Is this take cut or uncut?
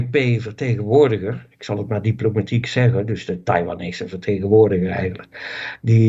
uncut